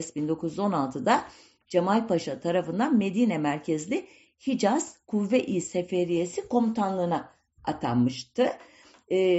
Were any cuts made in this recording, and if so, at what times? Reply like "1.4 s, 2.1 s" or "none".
none